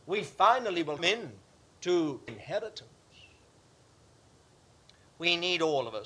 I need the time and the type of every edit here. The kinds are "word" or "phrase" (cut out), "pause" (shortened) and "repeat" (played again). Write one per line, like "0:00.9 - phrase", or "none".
0:01.0 - word
0:02.3 - word